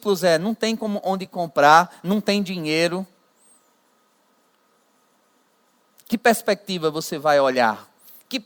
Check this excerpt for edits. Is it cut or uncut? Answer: uncut